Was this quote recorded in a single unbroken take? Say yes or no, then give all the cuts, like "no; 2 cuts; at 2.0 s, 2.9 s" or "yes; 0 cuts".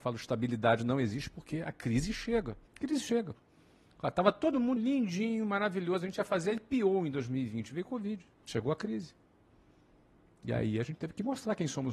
no; 3 cuts; at 2.7 s, 4.8 s, 8.3 s